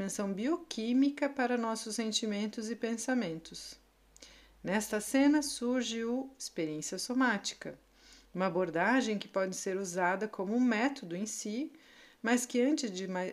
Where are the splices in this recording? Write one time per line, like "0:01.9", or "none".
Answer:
none